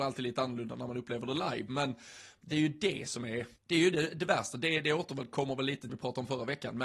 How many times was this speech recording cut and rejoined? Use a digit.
2